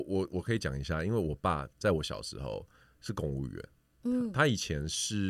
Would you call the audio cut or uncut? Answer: uncut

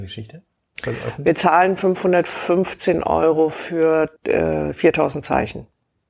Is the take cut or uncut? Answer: cut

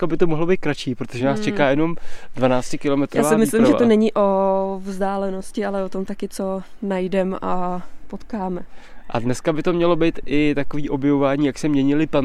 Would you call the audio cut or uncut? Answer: uncut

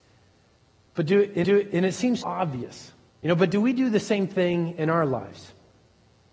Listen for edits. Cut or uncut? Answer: cut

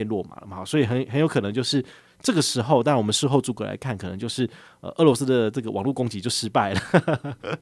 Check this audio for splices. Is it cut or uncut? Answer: uncut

